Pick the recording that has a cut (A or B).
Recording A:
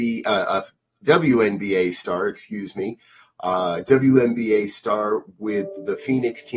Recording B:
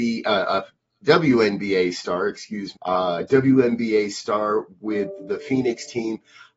B